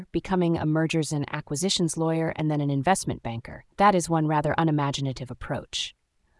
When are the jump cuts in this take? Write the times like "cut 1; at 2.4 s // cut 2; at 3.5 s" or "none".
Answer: cut 1; at 3.7 s